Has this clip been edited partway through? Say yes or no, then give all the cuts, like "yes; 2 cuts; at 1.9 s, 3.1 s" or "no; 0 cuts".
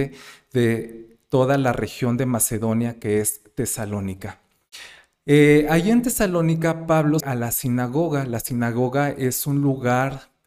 yes; 1 cut; at 7.2 s